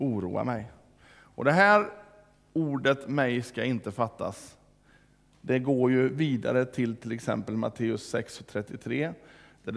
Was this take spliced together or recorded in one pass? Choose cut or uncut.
uncut